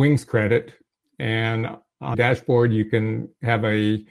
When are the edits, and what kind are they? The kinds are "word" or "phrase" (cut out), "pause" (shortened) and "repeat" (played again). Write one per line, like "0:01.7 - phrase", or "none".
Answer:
0:02.1 - word